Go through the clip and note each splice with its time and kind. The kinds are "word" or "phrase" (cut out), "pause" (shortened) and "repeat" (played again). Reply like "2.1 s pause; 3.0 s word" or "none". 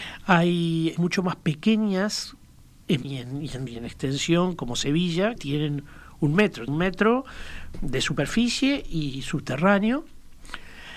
1.0 s word; 3.0 s word; 3.7 s word; 5.4 s word; 6.7 s word; 7.7 s word